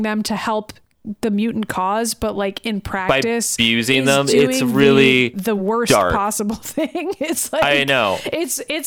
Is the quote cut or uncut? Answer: uncut